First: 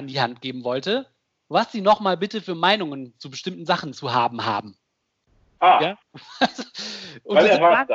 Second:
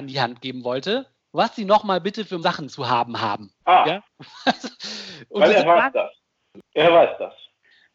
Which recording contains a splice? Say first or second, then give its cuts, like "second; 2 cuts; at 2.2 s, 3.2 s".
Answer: second; 3 cuts; at 1.2 s, 2.4 s, 3.6 s